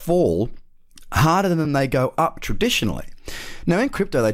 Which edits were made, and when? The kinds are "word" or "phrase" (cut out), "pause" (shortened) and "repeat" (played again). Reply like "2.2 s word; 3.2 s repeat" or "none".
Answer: none

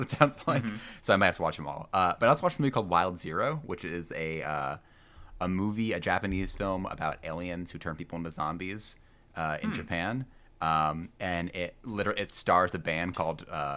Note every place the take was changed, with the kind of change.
none

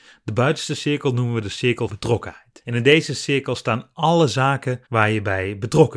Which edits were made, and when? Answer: 1.9 s word; 4.9 s pause

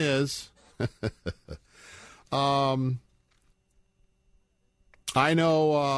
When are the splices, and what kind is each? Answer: 2.3 s phrase

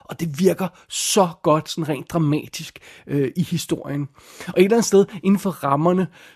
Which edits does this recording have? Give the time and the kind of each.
none

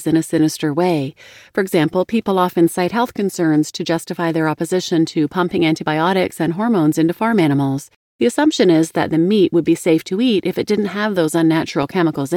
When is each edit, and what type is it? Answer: none

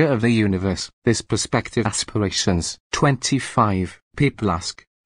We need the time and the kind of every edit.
1.8 s phrase

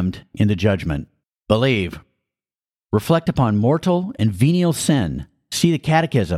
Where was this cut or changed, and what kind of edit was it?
1.2 s pause

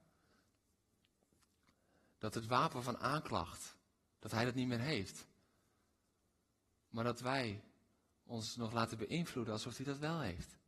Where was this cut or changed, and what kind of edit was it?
none

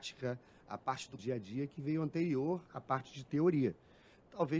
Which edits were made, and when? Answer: 1.2 s phrase; 2.7 s word

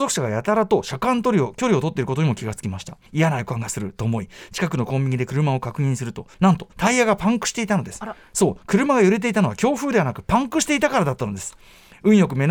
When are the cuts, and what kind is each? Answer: 3.1 s pause; 6.3 s pause; 6.7 s pause

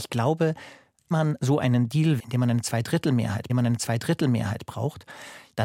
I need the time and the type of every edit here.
1.1 s word; 2.2 s word; 3.5 s repeat

